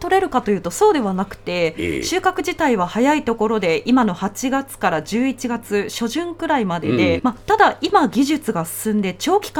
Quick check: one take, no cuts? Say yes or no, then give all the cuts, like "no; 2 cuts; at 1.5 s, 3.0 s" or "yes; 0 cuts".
no; 1 cut; at 7.2 s